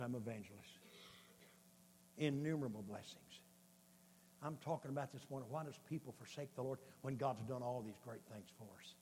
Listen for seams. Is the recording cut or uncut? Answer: uncut